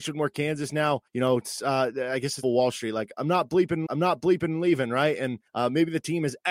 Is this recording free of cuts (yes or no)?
no